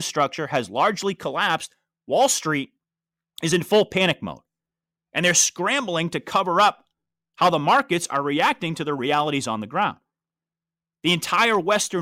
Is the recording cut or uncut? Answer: uncut